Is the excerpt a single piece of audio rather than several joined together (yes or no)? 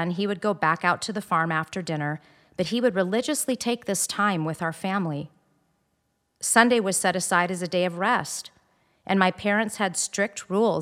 yes